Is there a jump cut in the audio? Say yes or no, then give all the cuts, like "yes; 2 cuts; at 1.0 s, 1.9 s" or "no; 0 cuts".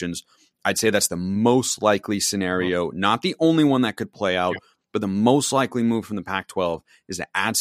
no; 0 cuts